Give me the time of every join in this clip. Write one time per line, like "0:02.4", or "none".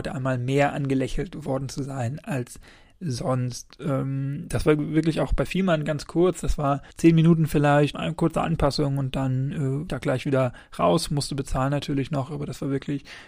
0:06.9
0:07.9
0:09.9